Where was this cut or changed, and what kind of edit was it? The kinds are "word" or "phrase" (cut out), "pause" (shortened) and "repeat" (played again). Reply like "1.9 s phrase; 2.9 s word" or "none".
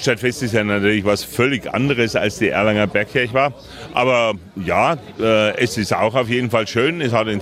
none